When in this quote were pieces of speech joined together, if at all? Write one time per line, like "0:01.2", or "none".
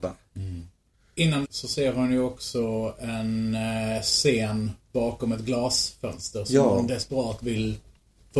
0:01.4